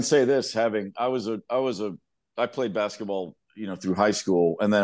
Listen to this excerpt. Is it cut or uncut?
uncut